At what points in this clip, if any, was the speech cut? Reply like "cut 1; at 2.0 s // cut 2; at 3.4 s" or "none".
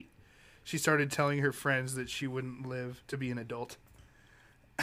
none